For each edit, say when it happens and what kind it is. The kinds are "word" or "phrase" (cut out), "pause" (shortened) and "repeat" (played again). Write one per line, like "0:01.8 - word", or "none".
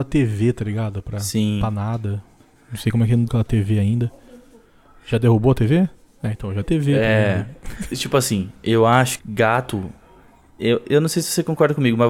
0:03.3 - word
0:06.6 - word
0:07.9 - word
0:09.2 - word
0:10.8 - word